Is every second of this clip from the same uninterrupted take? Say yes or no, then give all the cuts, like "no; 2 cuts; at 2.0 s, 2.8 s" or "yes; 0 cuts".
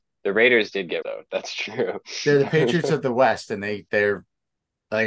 no; 1 cut; at 1.0 s